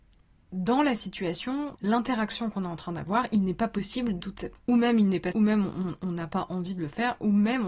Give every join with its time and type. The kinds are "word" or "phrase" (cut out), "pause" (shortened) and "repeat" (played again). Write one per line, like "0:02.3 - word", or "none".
0:01.8 - word
0:04.2 - word
0:04.6 - word
0:05.3 - word